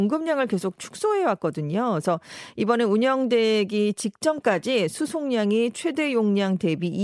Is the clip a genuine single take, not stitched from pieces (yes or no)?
yes